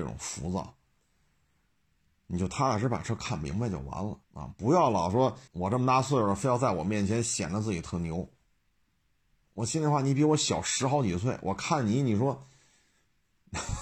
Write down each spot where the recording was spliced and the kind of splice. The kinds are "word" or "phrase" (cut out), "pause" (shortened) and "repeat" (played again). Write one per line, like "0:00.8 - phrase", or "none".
0:04.2 - pause
0:05.5 - pause
0:08.6 - pause